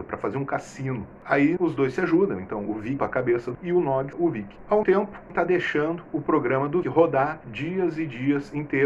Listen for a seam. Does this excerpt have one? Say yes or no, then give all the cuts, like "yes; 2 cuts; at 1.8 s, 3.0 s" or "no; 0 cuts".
yes; 7 cuts; at 1.6 s, 3.0 s, 3.5 s, 4.1 s, 4.8 s, 5.3 s, 6.8 s